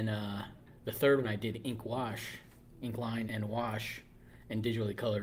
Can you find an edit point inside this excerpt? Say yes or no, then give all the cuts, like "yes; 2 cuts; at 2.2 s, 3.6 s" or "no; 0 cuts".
yes; 2 cuts; at 1.2 s, 3.2 s